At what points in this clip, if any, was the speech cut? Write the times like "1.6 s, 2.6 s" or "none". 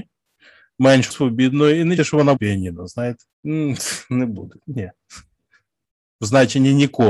1.1 s, 2.0 s, 2.4 s, 3.3 s